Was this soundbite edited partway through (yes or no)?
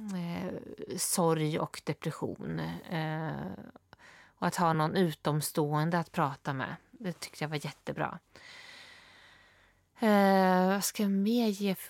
no